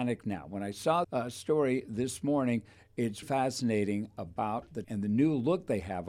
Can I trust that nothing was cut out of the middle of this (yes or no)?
no